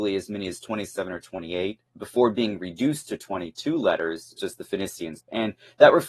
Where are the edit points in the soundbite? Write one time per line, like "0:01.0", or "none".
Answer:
0:01.9
0:04.4
0:05.2